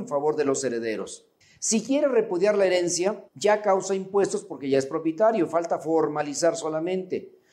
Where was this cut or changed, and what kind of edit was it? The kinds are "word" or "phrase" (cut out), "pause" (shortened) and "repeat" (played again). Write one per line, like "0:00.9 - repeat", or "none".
0:01.4 - pause
0:03.3 - pause